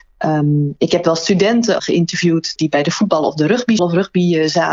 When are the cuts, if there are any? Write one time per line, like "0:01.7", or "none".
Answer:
0:01.8
0:02.6
0:03.8